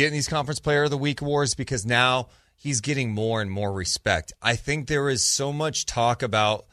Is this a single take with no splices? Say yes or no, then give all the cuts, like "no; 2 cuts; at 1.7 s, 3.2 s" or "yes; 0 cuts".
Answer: yes; 0 cuts